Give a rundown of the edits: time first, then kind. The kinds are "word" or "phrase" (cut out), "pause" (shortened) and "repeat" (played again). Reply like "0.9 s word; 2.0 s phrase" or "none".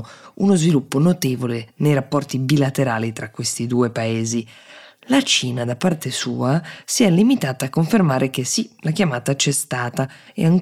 none